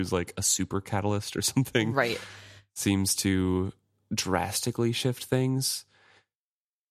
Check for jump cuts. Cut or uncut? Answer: uncut